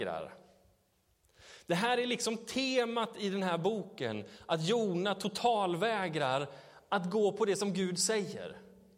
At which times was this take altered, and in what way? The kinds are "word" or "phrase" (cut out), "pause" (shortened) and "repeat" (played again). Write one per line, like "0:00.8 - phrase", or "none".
none